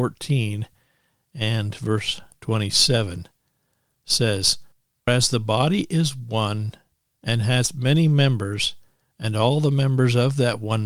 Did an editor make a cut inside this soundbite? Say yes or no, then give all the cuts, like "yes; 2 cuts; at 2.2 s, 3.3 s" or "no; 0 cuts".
yes; 1 cut; at 5.1 s